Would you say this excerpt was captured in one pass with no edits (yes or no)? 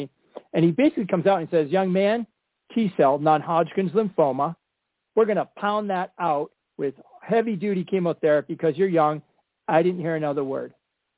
yes